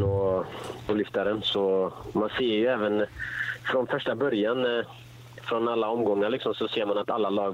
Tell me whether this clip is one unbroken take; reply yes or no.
yes